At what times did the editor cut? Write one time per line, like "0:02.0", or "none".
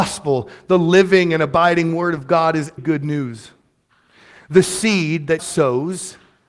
0:02.8
0:05.4